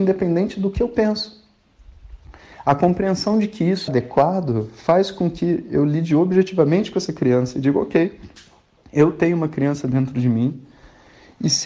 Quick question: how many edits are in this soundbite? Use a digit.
1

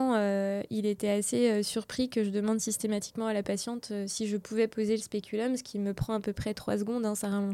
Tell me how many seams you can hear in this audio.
0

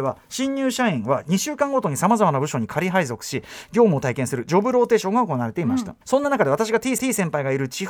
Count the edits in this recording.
2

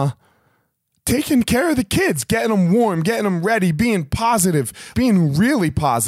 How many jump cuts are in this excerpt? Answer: 1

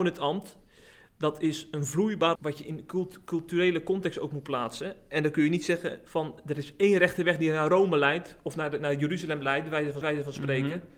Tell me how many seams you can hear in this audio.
2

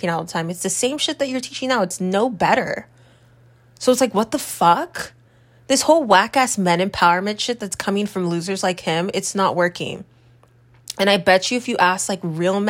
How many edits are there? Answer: 0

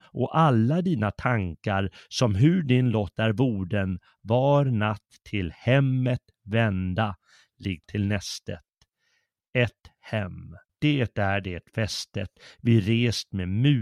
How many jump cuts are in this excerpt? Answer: 2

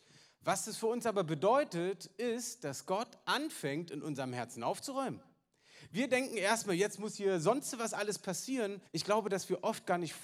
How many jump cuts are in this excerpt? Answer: 1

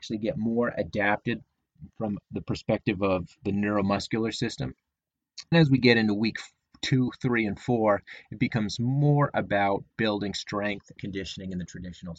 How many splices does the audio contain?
2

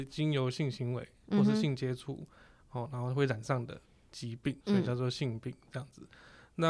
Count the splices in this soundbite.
1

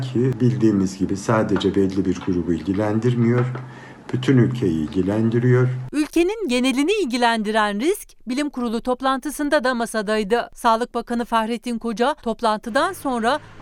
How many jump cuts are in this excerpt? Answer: 1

